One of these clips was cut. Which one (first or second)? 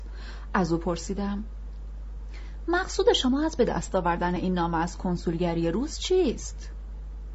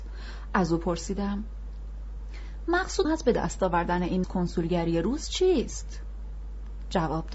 second